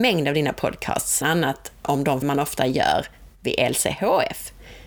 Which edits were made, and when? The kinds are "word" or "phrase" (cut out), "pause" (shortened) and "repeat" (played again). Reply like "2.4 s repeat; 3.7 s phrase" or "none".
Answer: 1.2 s word; 1.8 s word; 2.2 s word